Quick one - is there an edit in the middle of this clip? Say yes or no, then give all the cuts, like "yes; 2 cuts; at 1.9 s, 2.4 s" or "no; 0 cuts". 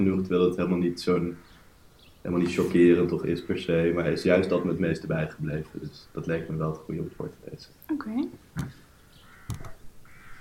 yes; 1 cut; at 3.2 s